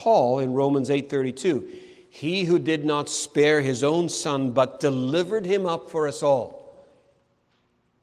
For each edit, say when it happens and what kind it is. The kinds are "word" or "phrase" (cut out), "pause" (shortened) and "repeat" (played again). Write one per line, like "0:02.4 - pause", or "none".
none